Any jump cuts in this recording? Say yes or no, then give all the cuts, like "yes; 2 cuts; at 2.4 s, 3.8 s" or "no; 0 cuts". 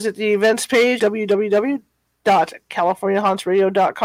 yes; 1 cut; at 1.0 s